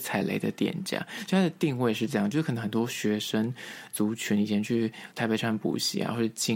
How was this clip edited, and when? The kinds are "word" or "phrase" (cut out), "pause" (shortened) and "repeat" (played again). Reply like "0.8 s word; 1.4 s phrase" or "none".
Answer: 5.1 s pause